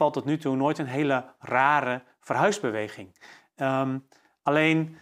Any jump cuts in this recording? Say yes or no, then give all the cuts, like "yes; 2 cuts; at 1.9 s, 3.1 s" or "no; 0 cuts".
no; 0 cuts